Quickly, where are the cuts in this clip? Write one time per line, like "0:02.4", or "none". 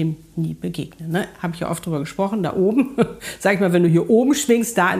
none